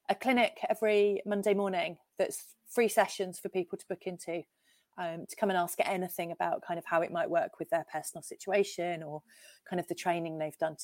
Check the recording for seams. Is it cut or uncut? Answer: uncut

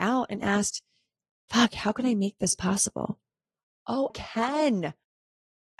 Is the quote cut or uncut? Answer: cut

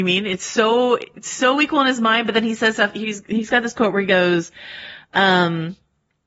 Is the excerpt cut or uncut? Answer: uncut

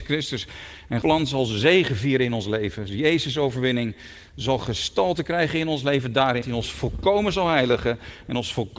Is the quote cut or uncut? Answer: cut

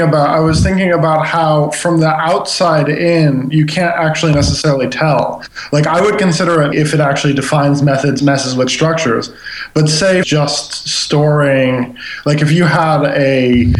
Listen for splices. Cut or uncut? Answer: cut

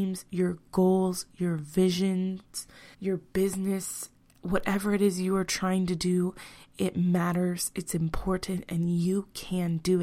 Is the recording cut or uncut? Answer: cut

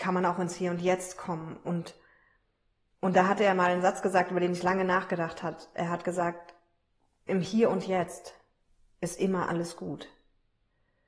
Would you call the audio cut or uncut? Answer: uncut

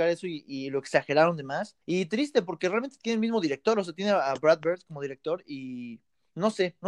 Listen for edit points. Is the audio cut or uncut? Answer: cut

